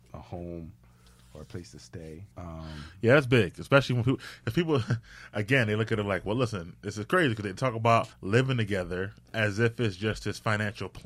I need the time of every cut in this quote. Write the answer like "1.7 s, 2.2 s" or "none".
2.3 s, 8.1 s, 9.2 s